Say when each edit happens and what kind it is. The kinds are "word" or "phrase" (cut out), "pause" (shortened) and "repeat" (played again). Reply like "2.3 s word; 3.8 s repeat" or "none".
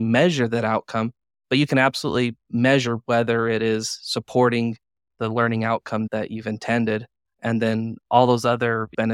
none